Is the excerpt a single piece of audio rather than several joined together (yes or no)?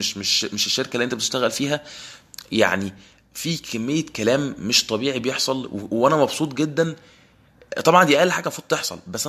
yes